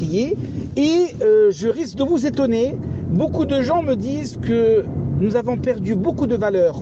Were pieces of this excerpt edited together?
no; 0 cuts

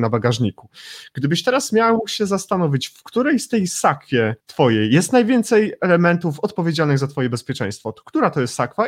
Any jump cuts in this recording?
yes; 1 cut; at 4.4 s

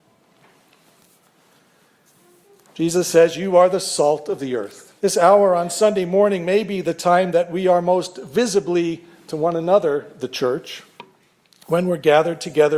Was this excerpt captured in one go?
no; 1 cut; at 5.0 s

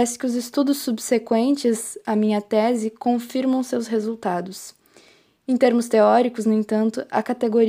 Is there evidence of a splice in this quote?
no; 0 cuts

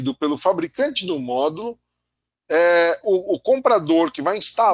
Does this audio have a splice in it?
no; 0 cuts

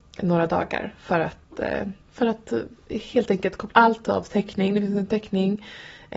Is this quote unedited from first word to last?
no; 3 cuts; at 2.0 s, 3.7 s, 5.1 s

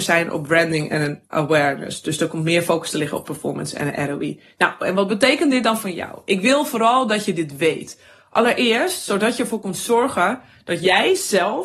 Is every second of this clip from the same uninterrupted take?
yes; 0 cuts

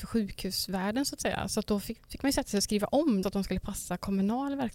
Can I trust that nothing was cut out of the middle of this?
no; 2 cuts; at 2.0 s, 3.2 s

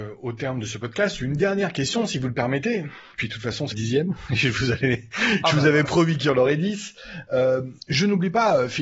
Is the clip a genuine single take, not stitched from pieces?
no; 1 cut; at 3.7 s

